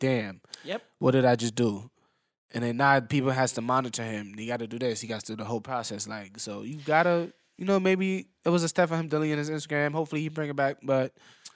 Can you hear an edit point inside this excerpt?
no; 0 cuts

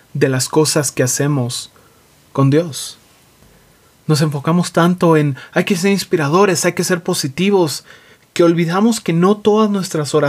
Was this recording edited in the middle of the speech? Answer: no; 0 cuts

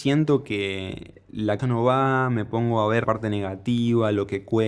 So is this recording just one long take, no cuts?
no; 2 cuts; at 1.6 s, 3.0 s

